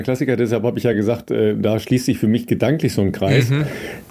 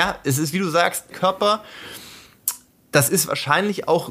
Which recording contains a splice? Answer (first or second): second